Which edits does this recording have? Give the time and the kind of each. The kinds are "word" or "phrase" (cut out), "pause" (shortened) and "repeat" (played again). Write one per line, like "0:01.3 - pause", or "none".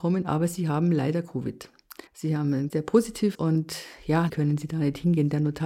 0:02.1 - pause
0:02.7 - word
0:03.3 - word
0:04.3 - word